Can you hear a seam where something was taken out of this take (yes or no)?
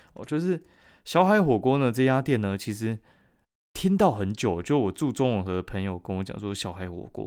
no